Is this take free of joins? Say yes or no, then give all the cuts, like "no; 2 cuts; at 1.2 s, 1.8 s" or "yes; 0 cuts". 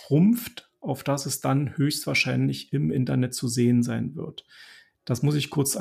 yes; 0 cuts